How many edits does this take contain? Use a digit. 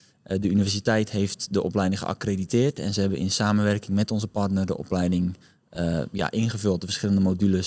0